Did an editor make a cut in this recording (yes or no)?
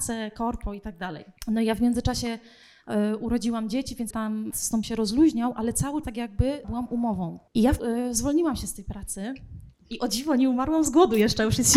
yes